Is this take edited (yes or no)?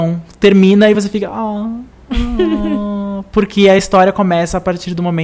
no